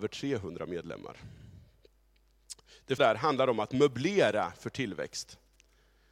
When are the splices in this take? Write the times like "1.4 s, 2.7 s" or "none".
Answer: 3.0 s